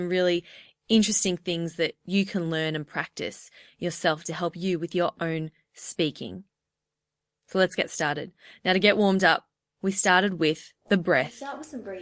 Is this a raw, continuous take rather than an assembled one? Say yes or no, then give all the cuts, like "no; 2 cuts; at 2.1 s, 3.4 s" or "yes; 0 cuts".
yes; 0 cuts